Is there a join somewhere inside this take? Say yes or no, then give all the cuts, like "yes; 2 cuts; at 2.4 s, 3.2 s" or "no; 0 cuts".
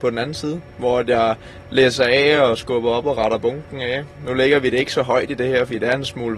no; 0 cuts